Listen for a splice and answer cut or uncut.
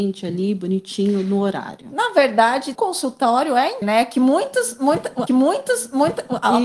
cut